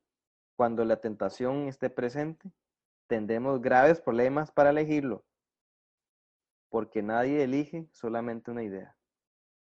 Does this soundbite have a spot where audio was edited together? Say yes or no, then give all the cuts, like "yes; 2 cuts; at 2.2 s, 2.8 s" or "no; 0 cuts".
no; 0 cuts